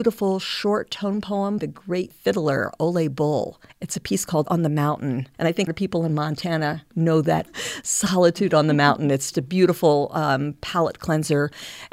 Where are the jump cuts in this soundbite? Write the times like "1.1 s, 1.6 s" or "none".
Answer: 1.6 s, 2.1 s, 3.7 s, 4.5 s, 5.3 s, 5.7 s, 6.9 s, 7.5 s, 9.3 s